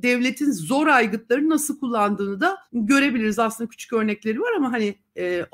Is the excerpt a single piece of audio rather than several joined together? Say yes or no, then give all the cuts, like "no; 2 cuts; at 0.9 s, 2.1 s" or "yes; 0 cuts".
no; 1 cut; at 2.7 s